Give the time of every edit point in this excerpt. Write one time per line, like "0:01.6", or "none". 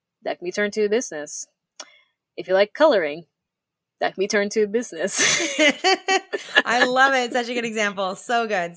none